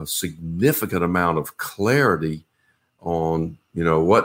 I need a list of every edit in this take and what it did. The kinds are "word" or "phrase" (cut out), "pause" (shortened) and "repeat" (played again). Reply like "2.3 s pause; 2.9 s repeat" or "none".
none